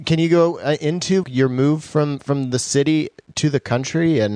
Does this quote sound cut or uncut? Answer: cut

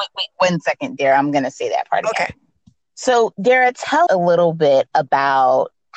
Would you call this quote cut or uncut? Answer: cut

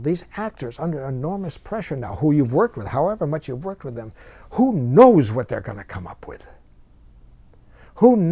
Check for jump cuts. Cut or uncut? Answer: uncut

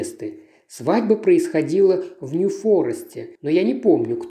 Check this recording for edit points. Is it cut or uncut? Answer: cut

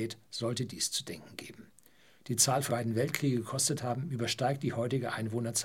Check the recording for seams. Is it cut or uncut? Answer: cut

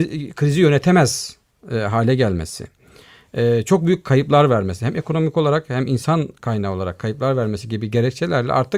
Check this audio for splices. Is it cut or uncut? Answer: uncut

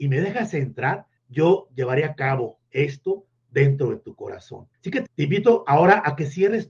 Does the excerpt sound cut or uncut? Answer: cut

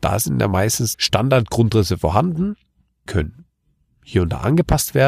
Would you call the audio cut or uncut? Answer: cut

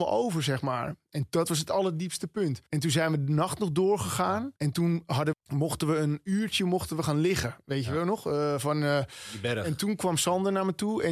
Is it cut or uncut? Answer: cut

